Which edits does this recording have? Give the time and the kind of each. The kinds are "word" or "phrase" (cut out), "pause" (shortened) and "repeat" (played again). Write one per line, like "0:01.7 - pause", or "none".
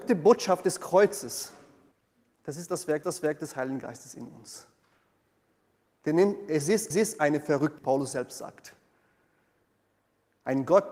0:01.9 - pause
0:03.0 - repeat
0:06.9 - repeat
0:07.8 - phrase